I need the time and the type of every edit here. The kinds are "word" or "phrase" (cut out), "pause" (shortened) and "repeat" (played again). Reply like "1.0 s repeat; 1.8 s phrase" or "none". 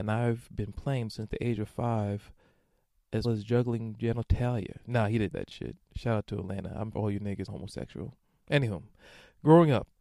1.1 s word; 3.2 s word; 5.3 s word; 6.9 s word; 7.5 s word